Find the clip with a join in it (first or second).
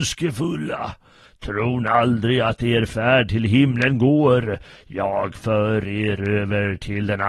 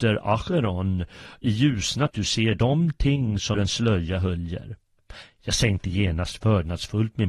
second